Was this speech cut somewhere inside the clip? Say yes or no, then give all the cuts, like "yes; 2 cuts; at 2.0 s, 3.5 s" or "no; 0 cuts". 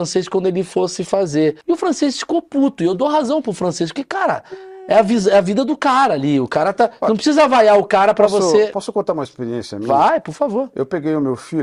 yes; 1 cut; at 1.6 s